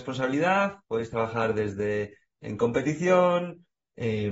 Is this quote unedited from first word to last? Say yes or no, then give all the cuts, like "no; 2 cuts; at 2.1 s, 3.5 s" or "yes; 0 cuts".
yes; 0 cuts